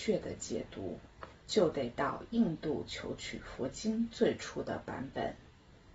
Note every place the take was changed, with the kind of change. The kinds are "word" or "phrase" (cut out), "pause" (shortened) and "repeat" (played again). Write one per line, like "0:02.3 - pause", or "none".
0:01.4 - pause

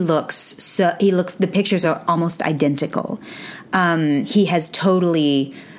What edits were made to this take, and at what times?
none

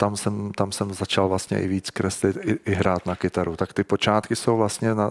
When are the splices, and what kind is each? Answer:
none

